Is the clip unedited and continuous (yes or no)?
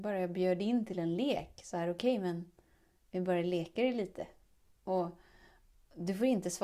yes